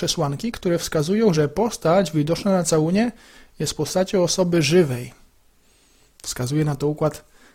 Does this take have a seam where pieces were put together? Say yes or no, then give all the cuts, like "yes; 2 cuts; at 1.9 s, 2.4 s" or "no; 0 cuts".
no; 0 cuts